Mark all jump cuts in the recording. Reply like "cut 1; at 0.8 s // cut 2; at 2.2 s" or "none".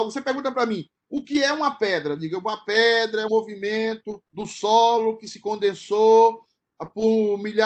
cut 1; at 3.3 s // cut 2; at 4.3 s